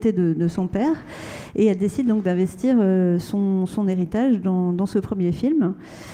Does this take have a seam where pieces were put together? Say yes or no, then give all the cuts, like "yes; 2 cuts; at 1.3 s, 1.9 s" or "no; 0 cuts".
no; 0 cuts